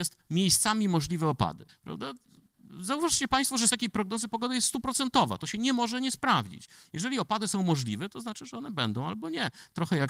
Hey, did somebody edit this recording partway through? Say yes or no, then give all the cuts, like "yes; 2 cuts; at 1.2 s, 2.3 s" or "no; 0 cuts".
yes; 2 cuts; at 1.7 s, 3.7 s